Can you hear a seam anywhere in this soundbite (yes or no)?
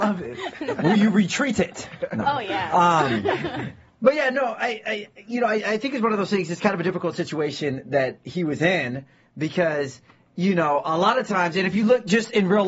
no